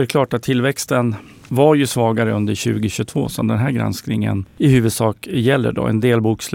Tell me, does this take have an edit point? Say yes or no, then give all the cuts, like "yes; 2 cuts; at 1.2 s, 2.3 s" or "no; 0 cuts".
no; 0 cuts